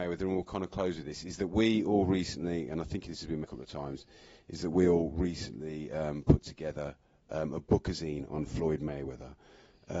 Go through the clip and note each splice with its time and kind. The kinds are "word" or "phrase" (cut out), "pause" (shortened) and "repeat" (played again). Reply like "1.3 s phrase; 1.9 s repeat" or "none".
3.4 s word